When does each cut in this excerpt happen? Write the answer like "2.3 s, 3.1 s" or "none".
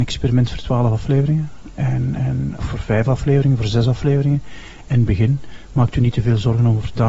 2.6 s